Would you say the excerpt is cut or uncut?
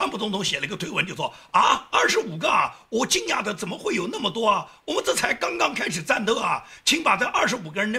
uncut